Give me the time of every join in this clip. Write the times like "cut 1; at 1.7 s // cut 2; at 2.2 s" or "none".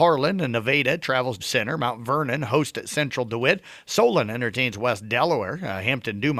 cut 1; at 1.4 s